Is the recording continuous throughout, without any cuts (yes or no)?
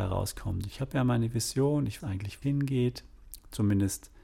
no